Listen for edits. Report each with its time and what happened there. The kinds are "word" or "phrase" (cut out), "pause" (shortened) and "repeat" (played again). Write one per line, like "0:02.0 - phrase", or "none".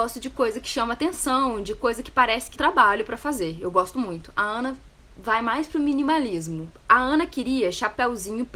0:02.5 - word